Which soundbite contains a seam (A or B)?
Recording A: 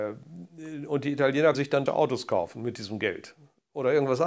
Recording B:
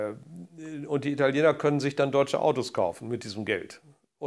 A